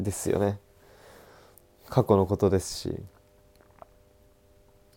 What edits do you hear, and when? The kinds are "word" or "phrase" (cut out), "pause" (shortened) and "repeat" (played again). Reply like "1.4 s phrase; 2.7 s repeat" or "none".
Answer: none